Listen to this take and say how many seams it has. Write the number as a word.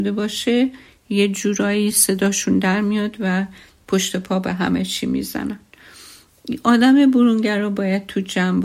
zero